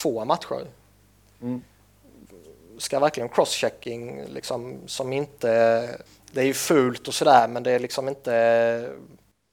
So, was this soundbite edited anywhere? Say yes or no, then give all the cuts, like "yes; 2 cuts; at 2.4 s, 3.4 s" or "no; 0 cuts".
yes; 1 cut; at 6.1 s